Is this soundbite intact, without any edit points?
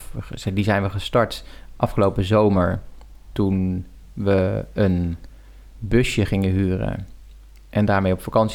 yes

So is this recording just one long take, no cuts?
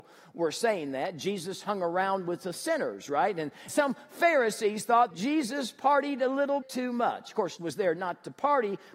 no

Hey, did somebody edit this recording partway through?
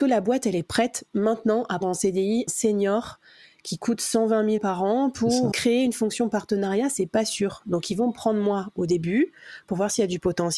yes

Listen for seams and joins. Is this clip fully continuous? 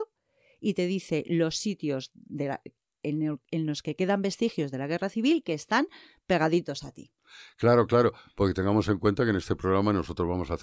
yes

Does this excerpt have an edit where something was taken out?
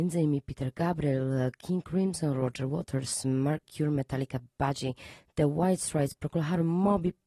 yes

